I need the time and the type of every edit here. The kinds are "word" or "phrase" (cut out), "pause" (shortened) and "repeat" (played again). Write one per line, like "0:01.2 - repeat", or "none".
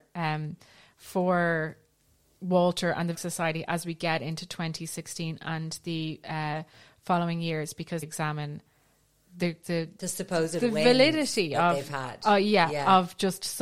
0:03.1 - word
0:08.0 - phrase
0:09.6 - phrase

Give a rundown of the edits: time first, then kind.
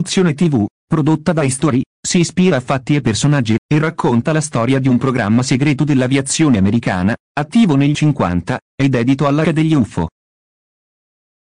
0:03.6 - word
0:07.9 - word
0:09.4 - word

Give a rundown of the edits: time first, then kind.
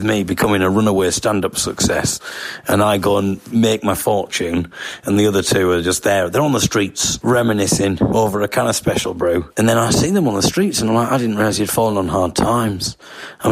none

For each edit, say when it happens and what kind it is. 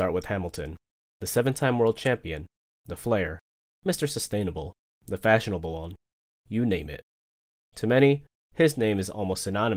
none

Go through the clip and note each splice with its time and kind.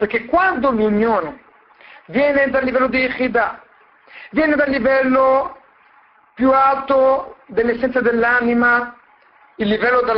none

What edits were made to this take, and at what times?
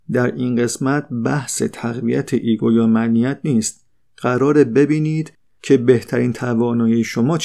none

